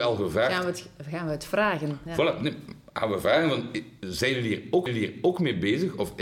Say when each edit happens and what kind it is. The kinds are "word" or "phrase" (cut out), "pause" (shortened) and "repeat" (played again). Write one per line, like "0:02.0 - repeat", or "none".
0:04.9 - repeat